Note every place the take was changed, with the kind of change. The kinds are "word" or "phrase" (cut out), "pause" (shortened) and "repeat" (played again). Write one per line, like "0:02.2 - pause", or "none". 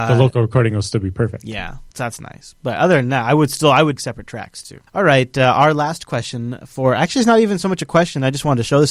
0:01.9 - pause
0:04.0 - word
0:04.9 - pause